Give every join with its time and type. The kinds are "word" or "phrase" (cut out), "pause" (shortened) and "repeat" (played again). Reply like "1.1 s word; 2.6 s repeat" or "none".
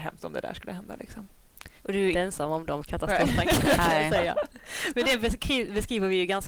1.8 s pause; 2.1 s word; 5.0 s word